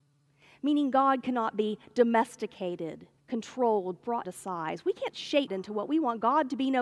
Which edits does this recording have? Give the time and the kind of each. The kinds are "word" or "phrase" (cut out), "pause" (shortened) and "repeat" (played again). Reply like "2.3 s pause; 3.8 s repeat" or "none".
3.2 s pause; 4.2 s word; 5.5 s word